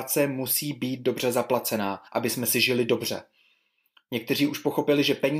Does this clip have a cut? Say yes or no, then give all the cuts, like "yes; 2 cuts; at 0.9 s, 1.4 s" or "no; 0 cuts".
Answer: yes; 1 cut; at 2.1 s